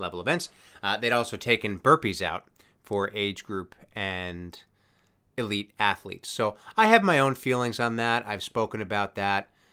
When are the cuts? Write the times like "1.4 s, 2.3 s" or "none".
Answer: none